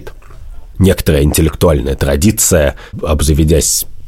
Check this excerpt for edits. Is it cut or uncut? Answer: uncut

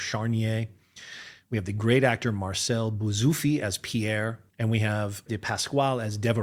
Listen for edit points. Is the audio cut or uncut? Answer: cut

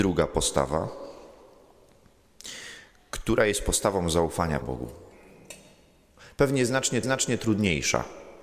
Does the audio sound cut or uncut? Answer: cut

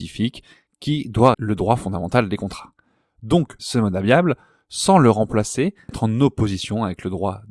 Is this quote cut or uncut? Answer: cut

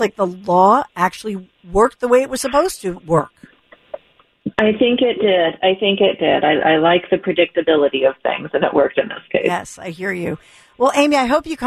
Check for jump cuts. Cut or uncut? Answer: uncut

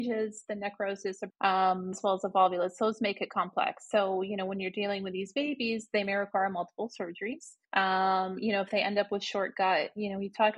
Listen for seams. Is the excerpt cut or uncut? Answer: cut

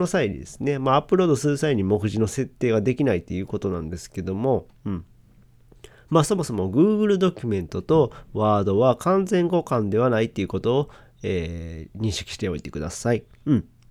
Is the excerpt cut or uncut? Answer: uncut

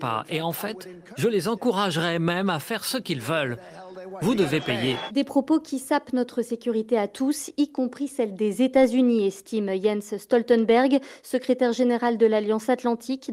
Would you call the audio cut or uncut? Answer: uncut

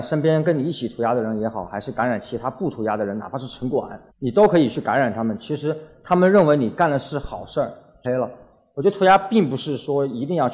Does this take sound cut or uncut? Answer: cut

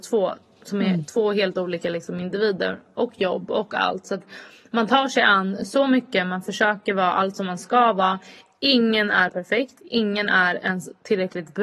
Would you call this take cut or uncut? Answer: uncut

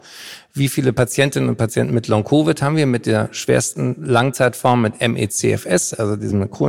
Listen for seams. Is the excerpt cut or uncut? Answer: uncut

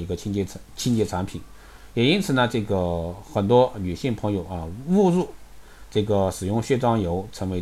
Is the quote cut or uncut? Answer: uncut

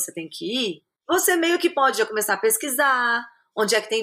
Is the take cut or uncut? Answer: uncut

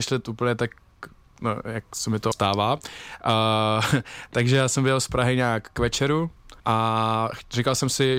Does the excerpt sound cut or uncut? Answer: cut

